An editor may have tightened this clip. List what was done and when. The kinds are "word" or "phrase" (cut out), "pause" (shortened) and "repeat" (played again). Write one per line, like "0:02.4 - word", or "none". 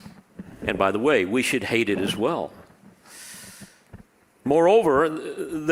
none